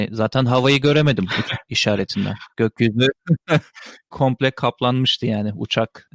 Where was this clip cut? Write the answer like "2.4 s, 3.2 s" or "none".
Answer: 1.4 s, 2.5 s, 4.1 s